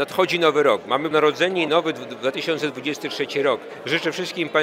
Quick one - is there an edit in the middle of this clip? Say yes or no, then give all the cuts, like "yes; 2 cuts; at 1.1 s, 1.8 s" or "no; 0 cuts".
yes; 2 cuts; at 1.1 s, 1.7 s